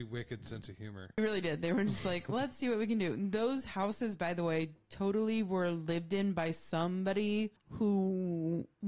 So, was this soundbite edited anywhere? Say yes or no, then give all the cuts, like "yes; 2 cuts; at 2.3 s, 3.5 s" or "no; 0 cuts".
no; 0 cuts